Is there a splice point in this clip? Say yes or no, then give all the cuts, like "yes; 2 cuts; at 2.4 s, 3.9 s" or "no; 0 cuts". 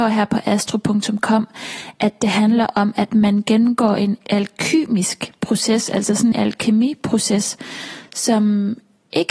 yes; 1 cut; at 6.3 s